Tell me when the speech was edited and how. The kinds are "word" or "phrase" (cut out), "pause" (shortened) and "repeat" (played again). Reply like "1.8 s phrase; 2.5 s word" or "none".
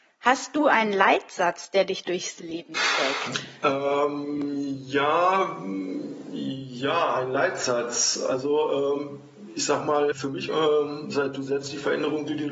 10.1 s word; 10.5 s phrase